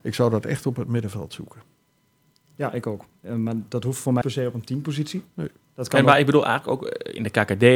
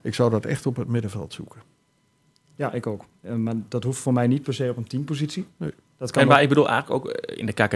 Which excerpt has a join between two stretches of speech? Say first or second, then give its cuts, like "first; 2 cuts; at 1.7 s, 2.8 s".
first; 1 cut; at 4.2 s